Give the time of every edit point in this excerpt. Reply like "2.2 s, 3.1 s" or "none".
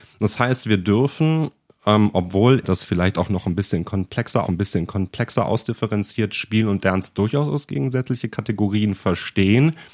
2.6 s, 4.4 s

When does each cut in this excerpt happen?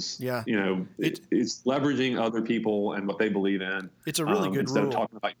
none

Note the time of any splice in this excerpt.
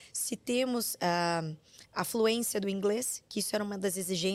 1.8 s

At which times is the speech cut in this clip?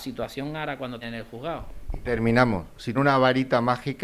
1.0 s, 2.9 s

